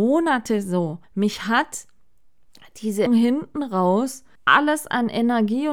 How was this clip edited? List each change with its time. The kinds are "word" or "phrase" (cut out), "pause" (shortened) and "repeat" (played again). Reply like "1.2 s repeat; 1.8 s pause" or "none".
1.0 s pause; 3.1 s word; 4.4 s pause

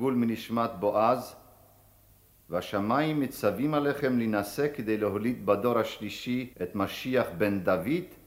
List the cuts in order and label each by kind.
6.5 s pause

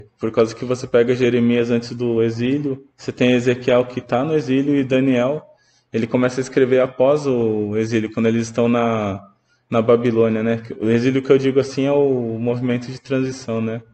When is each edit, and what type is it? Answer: 2.9 s pause

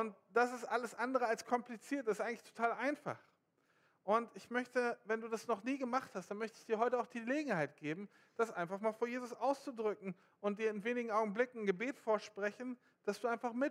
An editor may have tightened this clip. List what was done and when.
none

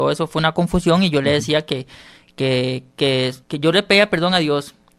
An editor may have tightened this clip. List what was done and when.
3.4 s pause

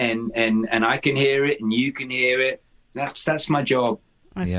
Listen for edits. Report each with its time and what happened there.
none

